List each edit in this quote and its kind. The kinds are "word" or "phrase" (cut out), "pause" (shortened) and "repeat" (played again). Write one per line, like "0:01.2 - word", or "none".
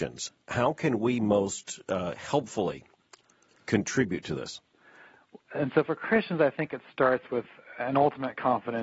none

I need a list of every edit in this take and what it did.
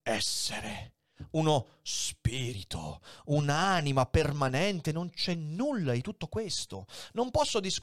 none

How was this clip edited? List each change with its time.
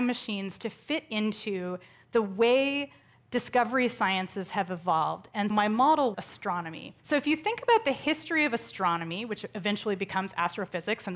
0:05.5 - word
0:06.1 - word
0:07.0 - pause

